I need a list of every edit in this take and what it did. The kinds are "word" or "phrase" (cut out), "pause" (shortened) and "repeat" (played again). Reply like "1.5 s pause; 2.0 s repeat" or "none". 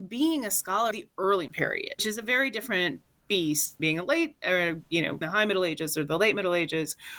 0.9 s word; 1.5 s word; 2.0 s word; 3.8 s word; 5.2 s word